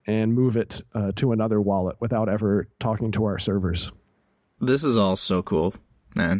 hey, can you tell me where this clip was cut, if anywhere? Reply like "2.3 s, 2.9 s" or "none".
4.4 s